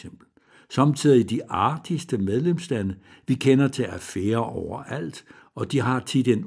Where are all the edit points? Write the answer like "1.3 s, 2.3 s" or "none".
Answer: none